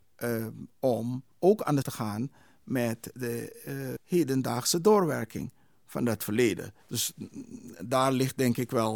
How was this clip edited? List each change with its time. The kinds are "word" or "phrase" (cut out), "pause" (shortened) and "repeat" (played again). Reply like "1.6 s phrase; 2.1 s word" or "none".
1.3 s pause; 1.8 s word; 4.0 s word; 6.8 s pause